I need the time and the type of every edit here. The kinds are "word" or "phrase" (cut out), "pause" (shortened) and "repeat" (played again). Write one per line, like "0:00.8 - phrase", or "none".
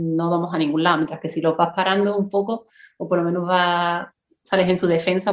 none